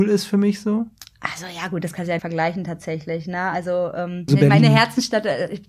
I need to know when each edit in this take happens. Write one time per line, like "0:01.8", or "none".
0:02.2
0:04.3

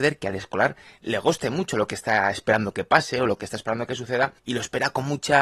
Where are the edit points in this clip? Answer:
0:04.4

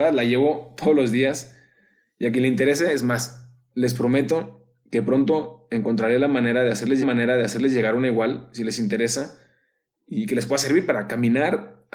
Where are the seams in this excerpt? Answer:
0:07.0

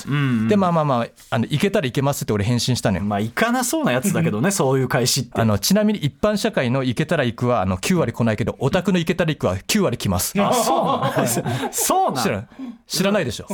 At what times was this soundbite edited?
none

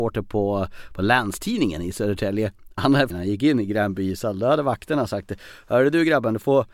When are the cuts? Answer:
0:03.1

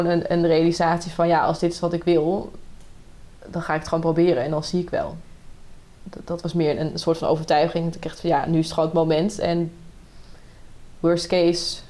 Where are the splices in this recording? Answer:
none

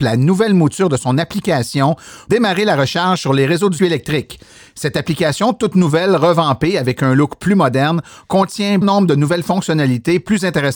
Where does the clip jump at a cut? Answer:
0:02.3
0:03.8
0:08.8

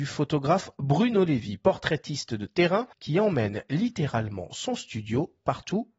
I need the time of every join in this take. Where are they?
0:02.9

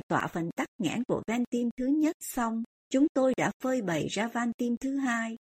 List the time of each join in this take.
0:02.7

